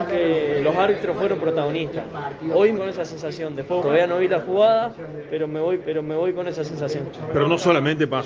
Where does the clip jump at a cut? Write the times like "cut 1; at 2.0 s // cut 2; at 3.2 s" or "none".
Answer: cut 1; at 2.8 s // cut 2; at 3.8 s // cut 3; at 5.8 s